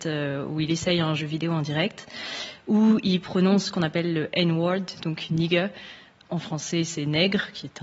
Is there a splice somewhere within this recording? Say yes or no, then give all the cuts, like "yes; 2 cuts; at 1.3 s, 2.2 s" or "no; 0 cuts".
no; 0 cuts